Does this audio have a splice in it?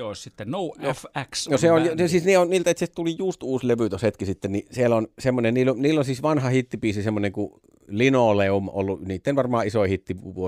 no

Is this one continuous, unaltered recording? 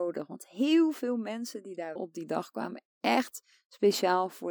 no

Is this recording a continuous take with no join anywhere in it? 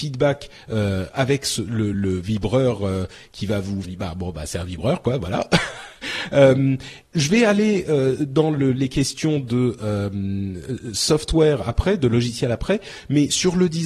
no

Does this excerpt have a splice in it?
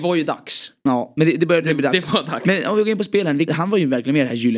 yes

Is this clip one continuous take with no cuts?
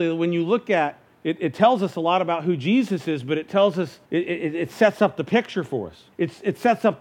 no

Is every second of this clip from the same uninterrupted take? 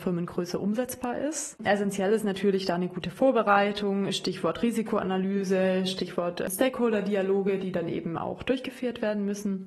yes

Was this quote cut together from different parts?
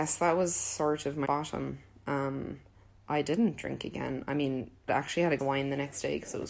yes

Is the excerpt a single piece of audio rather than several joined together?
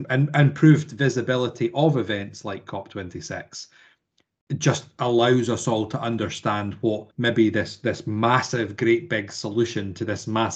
no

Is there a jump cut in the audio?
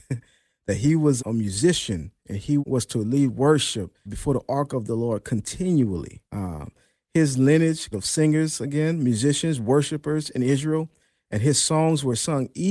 yes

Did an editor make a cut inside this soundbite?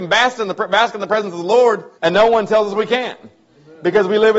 yes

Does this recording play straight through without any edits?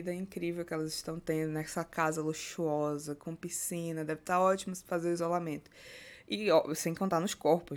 yes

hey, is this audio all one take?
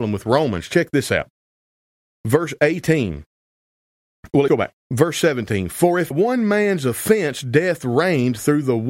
no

